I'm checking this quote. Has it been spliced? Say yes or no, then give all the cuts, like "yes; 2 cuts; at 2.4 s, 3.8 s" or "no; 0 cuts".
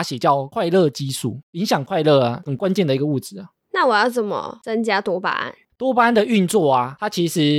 no; 0 cuts